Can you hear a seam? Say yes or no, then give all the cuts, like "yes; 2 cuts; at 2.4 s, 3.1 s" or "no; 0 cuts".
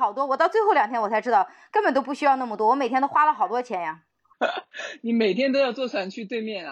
no; 0 cuts